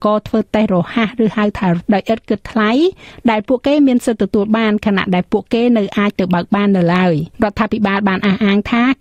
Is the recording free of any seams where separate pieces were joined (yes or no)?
no